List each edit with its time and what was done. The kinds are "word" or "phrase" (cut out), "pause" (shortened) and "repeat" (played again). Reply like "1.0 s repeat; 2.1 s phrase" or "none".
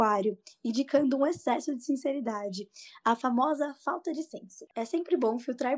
none